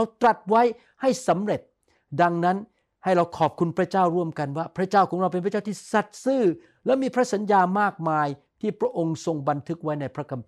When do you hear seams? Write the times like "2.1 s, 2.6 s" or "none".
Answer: none